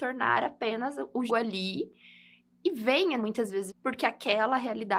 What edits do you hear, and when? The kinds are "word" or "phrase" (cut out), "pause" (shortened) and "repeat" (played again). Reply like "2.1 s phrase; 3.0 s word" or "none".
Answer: 1.3 s word; 3.2 s word; 3.7 s word